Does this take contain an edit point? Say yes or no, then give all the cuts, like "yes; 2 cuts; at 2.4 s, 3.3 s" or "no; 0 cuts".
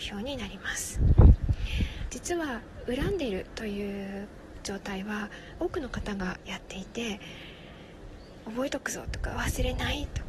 yes; 1 cut; at 5.6 s